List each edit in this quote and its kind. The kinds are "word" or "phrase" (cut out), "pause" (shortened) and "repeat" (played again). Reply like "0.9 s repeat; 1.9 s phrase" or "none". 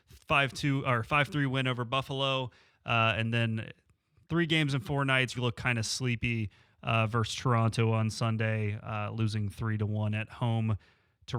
5.3 s word